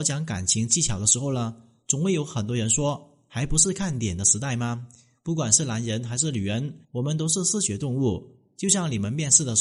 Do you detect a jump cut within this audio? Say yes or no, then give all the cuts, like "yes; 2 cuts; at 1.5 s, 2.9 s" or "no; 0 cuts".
yes; 1 cut; at 6.8 s